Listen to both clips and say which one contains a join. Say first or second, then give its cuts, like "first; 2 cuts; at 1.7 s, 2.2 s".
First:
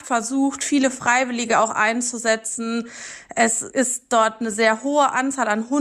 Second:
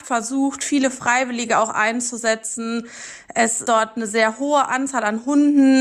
second; 1 cut; at 3.6 s